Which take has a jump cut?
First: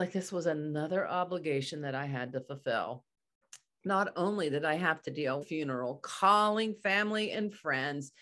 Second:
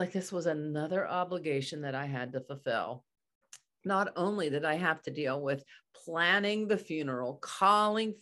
first; 1 cut; at 5.4 s

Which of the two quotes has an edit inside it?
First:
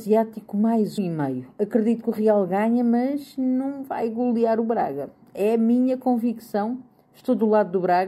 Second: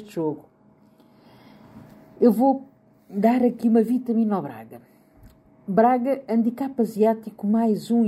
first; 1 cut; at 1.0 s

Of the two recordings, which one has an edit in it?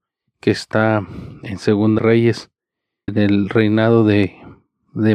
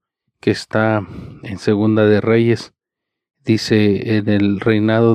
first; 2 cuts; at 2.0 s, 3.1 s

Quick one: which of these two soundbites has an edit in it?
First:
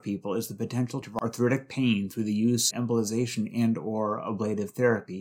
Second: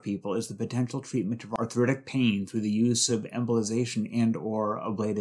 first; 2 cuts; at 1.0 s, 2.7 s

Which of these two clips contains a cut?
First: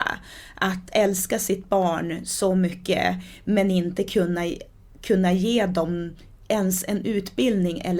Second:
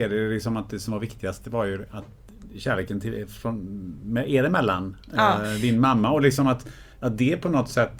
second; 1 cut; at 6.9 s

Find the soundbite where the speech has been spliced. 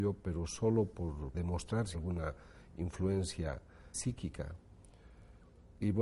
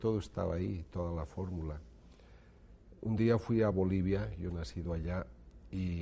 first; 3 cuts; at 1.3 s, 1.9 s, 3.9 s

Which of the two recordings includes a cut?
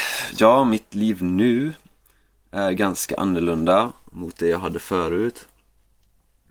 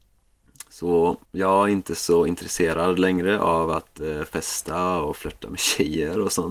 second; 1 cut; at 1.2 s

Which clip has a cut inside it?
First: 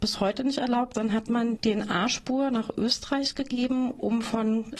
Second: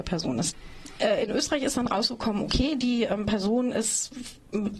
first; 2 cuts; at 0.9 s, 1.6 s

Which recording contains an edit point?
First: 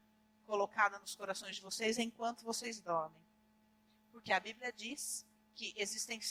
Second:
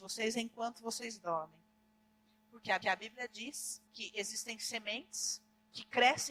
second; 2 cuts; at 2.8 s, 3.9 s

